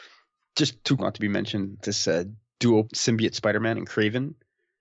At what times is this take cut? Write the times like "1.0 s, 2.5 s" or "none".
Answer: 1.0 s, 1.8 s, 2.9 s